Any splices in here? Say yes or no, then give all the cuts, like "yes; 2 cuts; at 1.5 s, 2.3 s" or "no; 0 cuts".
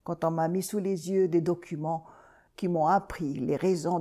no; 0 cuts